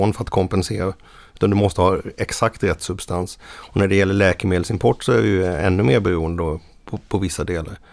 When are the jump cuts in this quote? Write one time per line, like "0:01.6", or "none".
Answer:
none